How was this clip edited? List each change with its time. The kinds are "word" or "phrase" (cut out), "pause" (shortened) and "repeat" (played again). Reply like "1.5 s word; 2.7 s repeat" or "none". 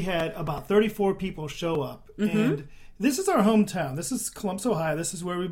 none